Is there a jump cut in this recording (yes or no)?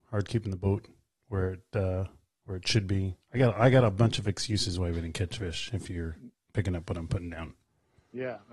no